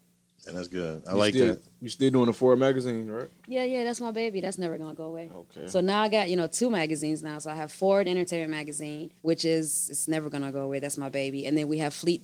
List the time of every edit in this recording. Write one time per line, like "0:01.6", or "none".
0:09.2